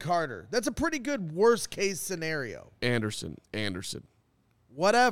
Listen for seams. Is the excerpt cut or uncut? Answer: cut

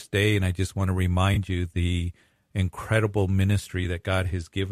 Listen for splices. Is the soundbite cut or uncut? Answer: uncut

